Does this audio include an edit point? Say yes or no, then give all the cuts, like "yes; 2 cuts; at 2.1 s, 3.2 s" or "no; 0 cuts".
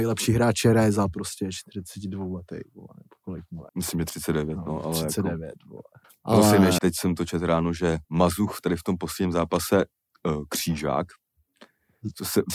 yes; 4 cuts; at 3.7 s, 6.0 s, 6.8 s, 8.0 s